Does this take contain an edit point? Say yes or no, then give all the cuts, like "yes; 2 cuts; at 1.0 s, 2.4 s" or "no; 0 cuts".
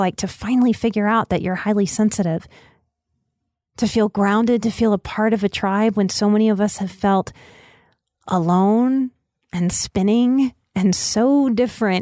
no; 0 cuts